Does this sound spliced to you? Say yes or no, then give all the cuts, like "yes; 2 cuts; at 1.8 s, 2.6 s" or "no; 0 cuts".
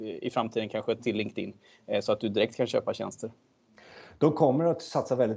yes; 1 cut; at 1.0 s